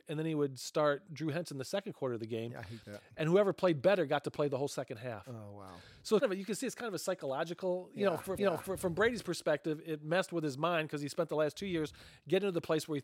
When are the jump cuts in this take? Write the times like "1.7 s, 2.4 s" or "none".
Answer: 6.2 s, 8.4 s